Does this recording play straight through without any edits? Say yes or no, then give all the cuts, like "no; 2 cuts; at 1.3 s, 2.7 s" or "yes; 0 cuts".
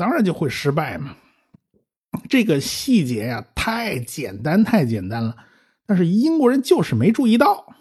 yes; 0 cuts